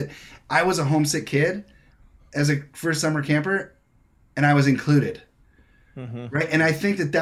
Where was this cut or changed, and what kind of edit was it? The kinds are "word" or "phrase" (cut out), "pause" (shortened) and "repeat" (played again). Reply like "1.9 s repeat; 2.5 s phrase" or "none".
none